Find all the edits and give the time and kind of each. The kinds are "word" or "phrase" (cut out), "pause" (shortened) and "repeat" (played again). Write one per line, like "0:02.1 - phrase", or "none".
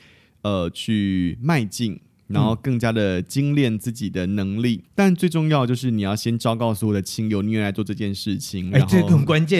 0:04.8 - word